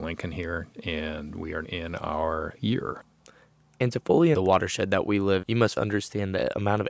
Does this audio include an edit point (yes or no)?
yes